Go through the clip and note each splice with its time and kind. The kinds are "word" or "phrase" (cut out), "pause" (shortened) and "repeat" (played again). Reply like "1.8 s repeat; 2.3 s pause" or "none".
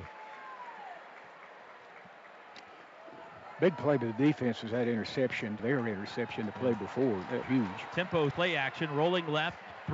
5.6 s word; 7.4 s word; 8.3 s word